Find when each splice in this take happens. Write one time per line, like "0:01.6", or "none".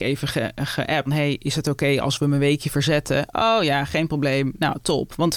0:01.1